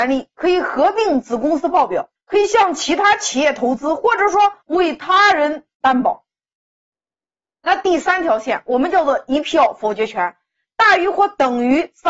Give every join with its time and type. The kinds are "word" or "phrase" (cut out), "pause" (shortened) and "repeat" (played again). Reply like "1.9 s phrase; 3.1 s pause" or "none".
2.2 s pause; 4.6 s pause; 5.7 s pause

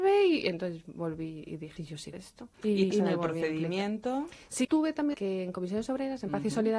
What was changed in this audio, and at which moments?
1.8 s word; 2.1 s word; 2.5 s pause; 2.9 s phrase; 4.6 s word; 5.1 s phrase

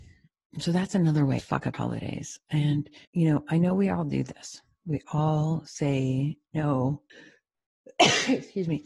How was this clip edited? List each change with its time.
1.4 s word; 1.7 s word; 3.1 s pause; 7.1 s pause

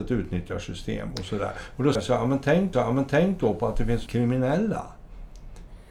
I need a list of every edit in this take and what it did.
2.0 s word; 2.7 s repeat; 4.1 s word

